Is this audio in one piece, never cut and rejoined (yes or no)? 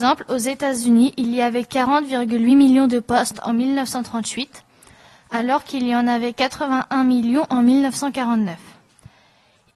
yes